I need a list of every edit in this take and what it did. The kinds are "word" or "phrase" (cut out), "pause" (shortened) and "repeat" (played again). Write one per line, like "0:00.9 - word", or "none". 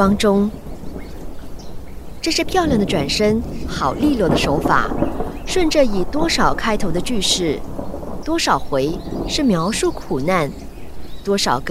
0:08.2 - phrase